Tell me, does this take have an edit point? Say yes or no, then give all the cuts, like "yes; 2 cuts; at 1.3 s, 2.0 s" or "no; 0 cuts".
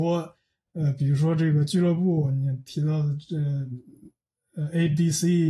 no; 0 cuts